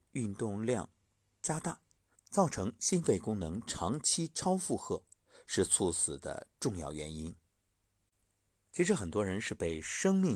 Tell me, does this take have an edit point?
yes; 1 cut; at 2.1 s

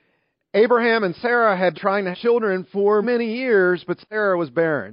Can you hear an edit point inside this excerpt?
yes; 3 cuts; at 1.7 s, 2.1 s, 3.0 s

